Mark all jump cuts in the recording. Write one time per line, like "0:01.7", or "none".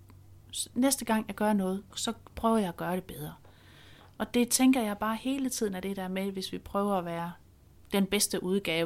0:01.9